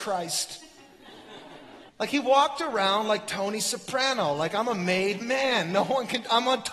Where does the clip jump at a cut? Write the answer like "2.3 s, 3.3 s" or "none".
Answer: 1.9 s